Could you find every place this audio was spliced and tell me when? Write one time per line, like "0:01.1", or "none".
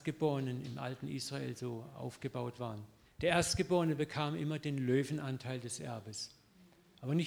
0:03.0